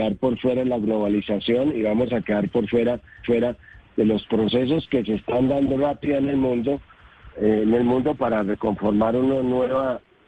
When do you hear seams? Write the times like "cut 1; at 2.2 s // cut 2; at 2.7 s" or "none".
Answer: cut 1; at 3.2 s // cut 2; at 5.8 s